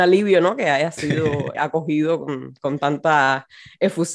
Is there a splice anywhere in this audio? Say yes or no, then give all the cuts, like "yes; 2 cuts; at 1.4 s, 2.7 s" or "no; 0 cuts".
yes; 1 cut; at 1.5 s